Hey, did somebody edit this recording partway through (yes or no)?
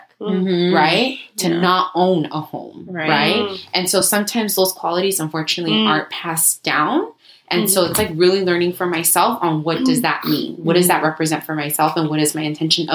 no